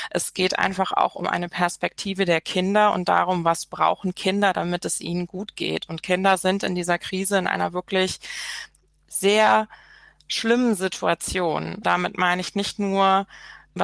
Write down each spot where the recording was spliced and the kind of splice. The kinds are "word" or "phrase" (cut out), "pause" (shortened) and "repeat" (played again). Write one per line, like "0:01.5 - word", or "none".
none